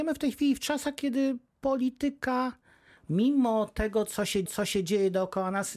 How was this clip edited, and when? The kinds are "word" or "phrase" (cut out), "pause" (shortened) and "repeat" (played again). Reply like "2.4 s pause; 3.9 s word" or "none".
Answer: 4.5 s repeat